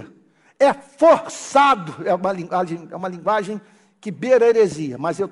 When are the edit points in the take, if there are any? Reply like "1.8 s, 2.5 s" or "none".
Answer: none